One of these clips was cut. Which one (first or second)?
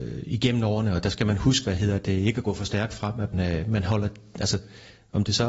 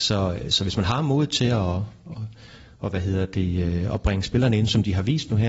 first